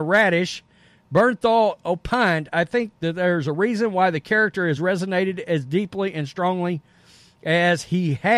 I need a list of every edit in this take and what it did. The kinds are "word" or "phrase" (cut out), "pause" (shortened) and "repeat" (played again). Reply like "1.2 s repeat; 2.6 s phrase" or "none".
none